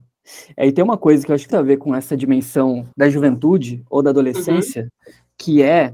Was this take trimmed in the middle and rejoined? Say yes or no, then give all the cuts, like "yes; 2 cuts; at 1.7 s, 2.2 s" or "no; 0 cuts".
yes; 2 cuts; at 1.5 s, 2.9 s